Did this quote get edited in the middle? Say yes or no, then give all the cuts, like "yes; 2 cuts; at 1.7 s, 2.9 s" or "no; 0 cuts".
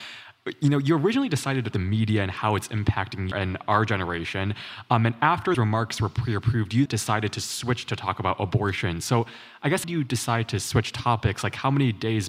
yes; 5 cuts; at 1.7 s, 3.3 s, 5.5 s, 6.9 s, 9.8 s